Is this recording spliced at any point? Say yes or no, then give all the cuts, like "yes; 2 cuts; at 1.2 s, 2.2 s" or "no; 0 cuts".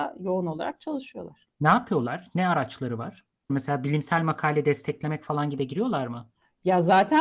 yes; 1 cut; at 5.6 s